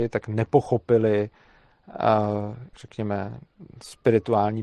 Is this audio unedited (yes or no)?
no